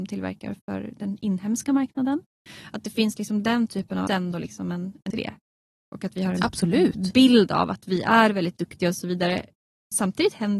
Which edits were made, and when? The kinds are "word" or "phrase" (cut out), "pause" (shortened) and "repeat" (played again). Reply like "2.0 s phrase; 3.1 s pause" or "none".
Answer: 4.1 s phrase; 5.1 s phrase